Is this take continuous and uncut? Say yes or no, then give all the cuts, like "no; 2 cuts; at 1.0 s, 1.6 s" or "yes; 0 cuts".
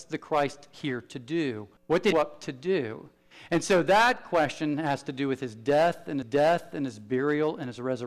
no; 3 cuts; at 1.8 s, 2.1 s, 6.2 s